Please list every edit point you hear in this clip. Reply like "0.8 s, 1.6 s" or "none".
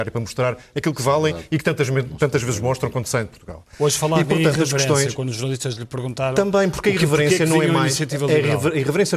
none